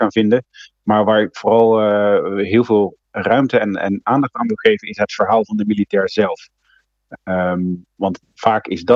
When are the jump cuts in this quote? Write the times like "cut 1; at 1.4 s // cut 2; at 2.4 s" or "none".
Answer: cut 1; at 3.0 s